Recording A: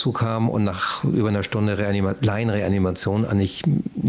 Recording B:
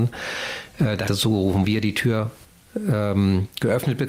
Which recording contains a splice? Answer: B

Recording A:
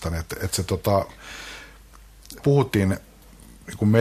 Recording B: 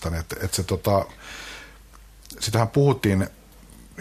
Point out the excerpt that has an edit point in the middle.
A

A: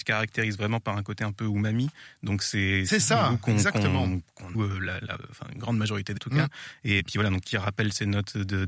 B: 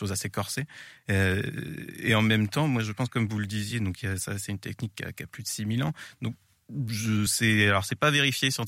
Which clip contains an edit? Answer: A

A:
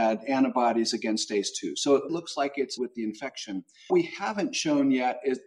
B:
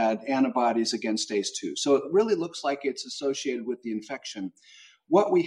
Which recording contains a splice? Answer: A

